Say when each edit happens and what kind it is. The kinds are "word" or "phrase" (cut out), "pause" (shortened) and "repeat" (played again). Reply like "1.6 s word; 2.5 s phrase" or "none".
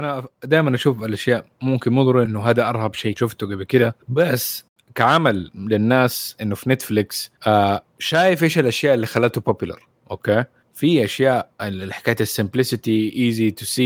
1.5 s pause; 2.3 s word; 3.2 s word; 4.0 s pause; 7.4 s pause